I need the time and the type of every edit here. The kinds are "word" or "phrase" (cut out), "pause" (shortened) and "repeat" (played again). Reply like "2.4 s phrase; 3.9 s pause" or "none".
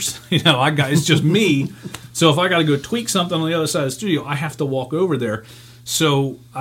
none